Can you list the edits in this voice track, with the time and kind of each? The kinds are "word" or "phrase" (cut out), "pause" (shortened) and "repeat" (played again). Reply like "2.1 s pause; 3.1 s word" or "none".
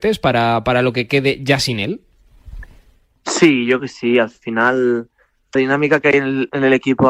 3.8 s word; 5.6 s word